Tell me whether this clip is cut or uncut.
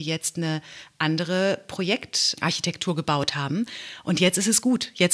uncut